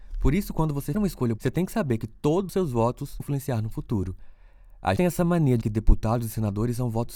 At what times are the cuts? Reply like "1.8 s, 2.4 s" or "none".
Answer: 0.9 s, 1.4 s, 2.5 s, 3.2 s, 5.0 s, 5.6 s